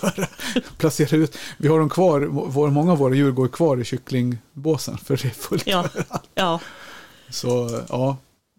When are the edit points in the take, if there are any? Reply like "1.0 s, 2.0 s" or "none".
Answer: none